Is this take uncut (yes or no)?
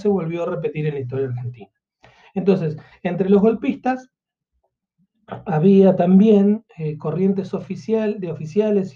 yes